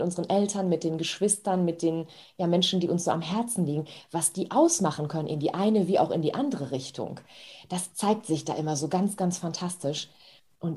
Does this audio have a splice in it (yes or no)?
no